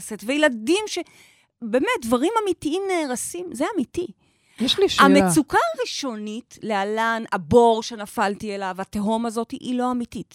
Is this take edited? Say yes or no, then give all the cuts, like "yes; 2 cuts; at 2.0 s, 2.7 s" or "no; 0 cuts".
no; 0 cuts